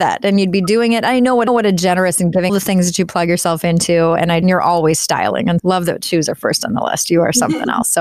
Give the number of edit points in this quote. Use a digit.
4